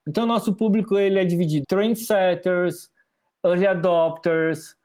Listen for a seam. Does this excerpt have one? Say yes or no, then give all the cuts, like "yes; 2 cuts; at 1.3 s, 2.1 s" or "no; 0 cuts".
yes; 1 cut; at 1.6 s